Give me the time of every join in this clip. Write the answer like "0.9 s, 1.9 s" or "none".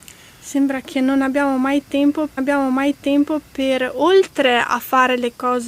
2.4 s